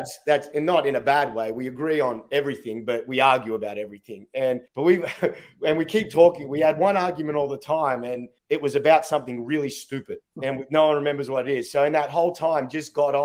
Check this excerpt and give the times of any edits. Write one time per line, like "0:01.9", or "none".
0:04.7
0:08.4
0:10.2